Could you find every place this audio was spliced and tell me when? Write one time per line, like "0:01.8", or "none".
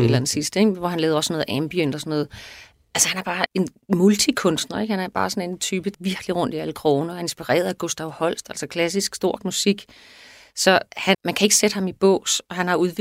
0:03.5
0:05.9
0:09.4
0:11.1